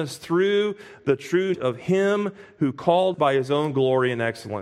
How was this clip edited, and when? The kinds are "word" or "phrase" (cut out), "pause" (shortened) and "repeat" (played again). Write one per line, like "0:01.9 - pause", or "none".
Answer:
0:01.5 - word
0:03.1 - word